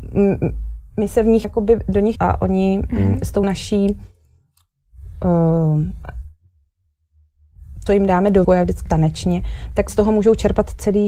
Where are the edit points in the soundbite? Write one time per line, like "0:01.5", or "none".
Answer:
0:01.4
0:02.2
0:03.4
0:07.9
0:08.4
0:08.9
0:09.9